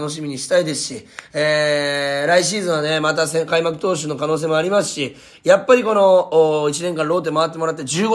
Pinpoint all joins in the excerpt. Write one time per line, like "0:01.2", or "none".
none